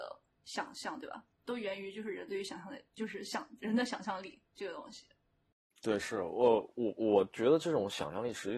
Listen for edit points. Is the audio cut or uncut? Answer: cut